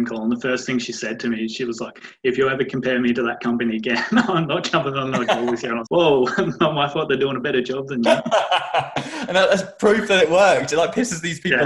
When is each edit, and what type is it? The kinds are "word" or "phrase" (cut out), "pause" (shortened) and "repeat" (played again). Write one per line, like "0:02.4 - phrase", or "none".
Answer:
0:05.9 - word